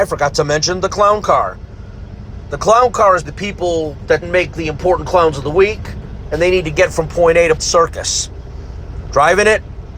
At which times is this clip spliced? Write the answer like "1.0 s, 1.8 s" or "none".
3.3 s, 4.2 s, 7.6 s